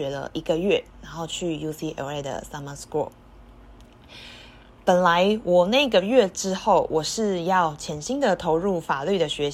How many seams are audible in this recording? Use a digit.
0